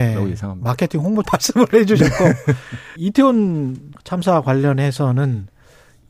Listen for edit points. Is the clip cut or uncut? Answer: cut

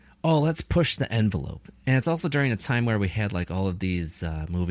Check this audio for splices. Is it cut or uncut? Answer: uncut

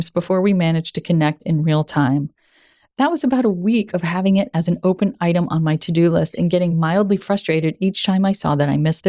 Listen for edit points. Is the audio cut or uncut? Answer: uncut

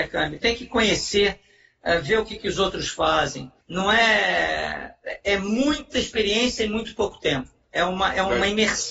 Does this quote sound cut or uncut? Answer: cut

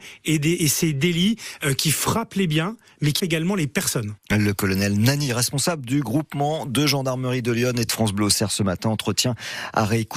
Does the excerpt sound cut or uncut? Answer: cut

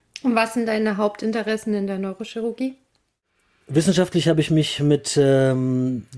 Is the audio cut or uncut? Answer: uncut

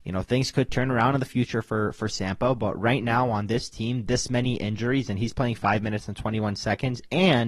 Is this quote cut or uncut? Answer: uncut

